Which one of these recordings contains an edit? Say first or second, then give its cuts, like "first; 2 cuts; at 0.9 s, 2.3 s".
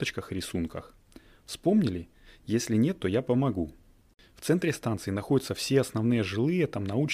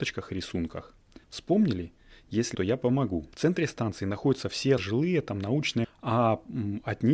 second; 5 cuts; at 1.2 s, 2.5 s, 3.3 s, 4.8 s, 5.8 s